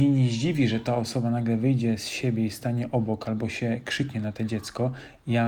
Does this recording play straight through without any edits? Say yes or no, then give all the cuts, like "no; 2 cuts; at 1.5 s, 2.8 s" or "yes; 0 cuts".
yes; 0 cuts